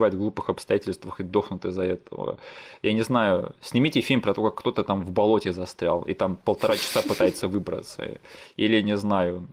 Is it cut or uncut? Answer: uncut